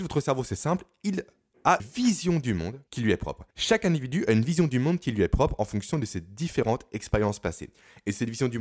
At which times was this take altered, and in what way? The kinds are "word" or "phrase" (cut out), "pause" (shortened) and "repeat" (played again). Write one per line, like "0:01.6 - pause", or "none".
0:01.8 - word
0:02.9 - pause
0:03.5 - pause